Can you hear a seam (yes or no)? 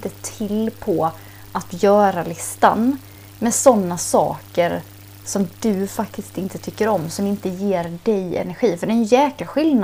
no